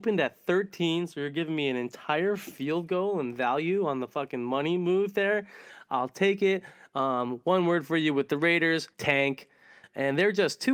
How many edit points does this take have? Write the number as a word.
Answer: one